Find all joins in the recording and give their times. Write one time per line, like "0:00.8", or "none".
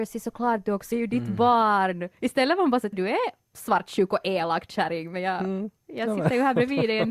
0:00.9
0:02.1
0:02.9

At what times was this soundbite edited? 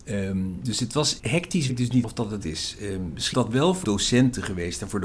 0:01.2
0:01.7
0:02.0
0:02.4
0:03.3
0:03.8

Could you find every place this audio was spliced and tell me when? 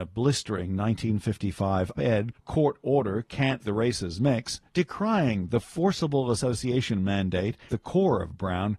0:01.9
0:02.3
0:03.6
0:04.7
0:07.7

